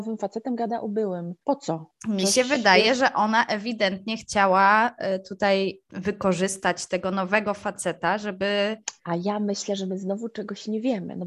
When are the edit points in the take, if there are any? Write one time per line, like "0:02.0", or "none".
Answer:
0:01.4
0:02.0
0:05.8
0:09.0